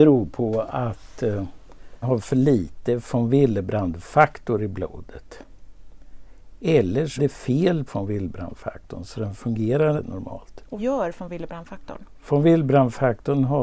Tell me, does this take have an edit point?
yes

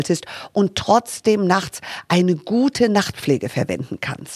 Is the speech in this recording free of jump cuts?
yes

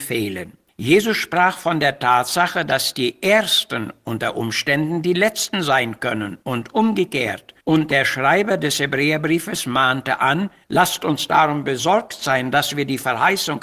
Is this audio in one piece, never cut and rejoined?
no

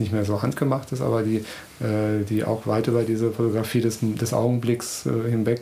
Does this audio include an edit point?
no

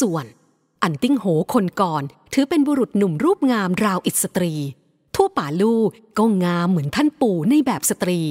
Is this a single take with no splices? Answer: yes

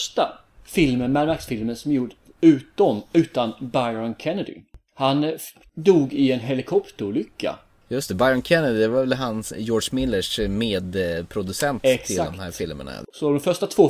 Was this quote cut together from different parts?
no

